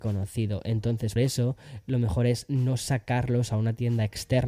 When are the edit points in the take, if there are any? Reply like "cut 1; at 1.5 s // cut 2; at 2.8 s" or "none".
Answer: cut 1; at 1.2 s